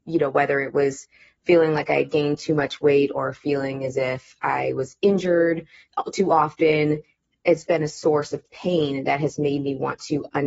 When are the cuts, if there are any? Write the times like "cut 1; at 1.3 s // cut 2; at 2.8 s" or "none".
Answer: cut 1; at 7.7 s